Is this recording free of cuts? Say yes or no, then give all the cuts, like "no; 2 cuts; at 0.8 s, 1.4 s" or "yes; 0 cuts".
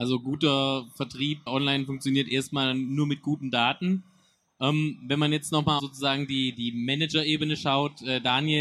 no; 3 cuts; at 1.5 s, 5.8 s, 6.5 s